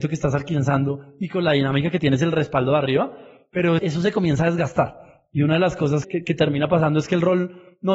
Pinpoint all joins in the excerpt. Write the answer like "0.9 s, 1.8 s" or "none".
3.8 s, 6.0 s